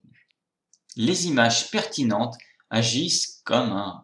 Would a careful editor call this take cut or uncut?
uncut